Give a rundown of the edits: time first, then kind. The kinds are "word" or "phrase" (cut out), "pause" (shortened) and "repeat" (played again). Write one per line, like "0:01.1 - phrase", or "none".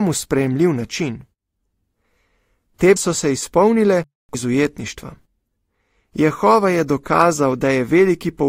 0:03.0 - word
0:04.3 - phrase